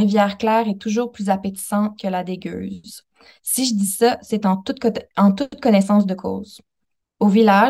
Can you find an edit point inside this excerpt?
no; 0 cuts

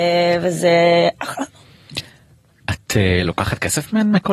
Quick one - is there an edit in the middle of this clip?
no; 0 cuts

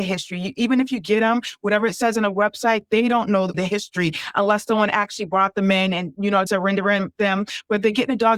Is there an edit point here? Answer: yes; 2 cuts; at 3.5 s, 6.5 s

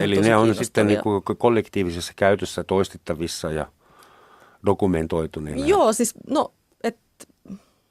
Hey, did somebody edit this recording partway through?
no; 0 cuts

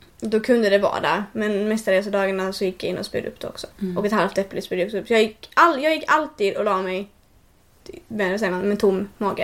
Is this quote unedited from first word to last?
no; 1 cut; at 3.7 s

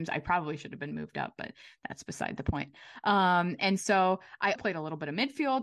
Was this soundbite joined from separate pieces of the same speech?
yes; 1 cut; at 4.6 s

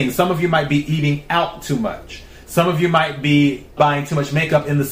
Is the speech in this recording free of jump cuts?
no; 1 cut; at 3.8 s

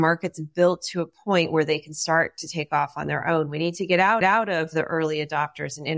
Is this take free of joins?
no; 1 cut; at 4.2 s

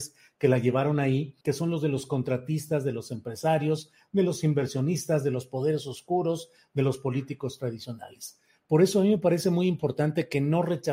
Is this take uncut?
no; 1 cut; at 1.4 s

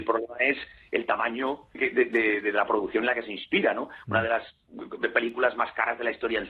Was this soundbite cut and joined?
yes; 1 cut; at 1.7 s

